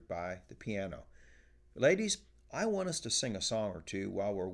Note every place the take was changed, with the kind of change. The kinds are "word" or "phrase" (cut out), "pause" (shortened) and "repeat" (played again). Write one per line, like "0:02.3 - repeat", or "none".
none